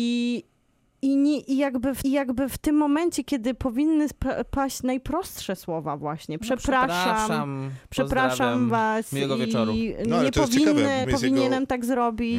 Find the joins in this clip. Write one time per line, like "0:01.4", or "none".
0:02.0
0:11.0